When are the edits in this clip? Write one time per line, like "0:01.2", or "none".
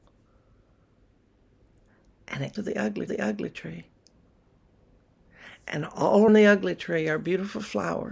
0:02.6
0:03.1
0:06.3